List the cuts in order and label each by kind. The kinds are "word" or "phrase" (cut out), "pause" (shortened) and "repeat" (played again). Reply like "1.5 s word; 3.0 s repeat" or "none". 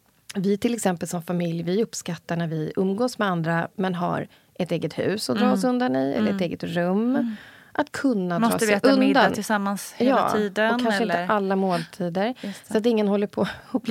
none

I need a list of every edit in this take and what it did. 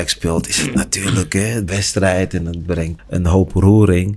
1.7 s word; 3.0 s word

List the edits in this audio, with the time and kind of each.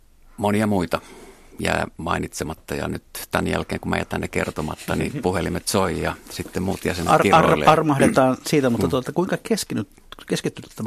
none

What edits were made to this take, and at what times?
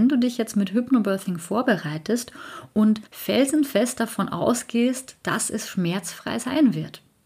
3.1 s pause

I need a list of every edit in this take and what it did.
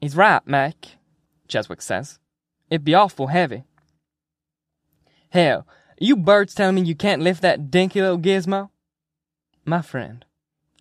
none

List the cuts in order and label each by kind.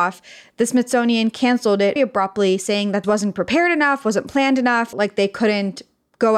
2.0 s word; 3.0 s phrase; 4.9 s phrase

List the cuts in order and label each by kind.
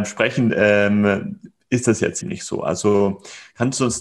2.2 s word

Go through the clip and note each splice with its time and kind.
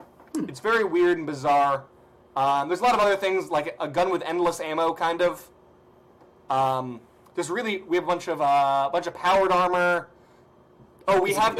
none

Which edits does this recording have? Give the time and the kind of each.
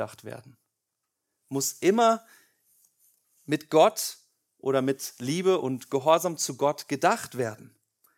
none

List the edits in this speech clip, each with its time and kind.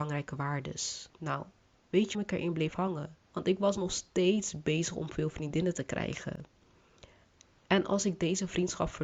1.1 s pause; 2.1 s word; 3.2 s pause

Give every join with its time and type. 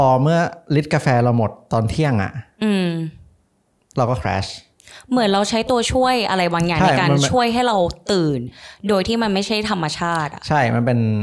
none

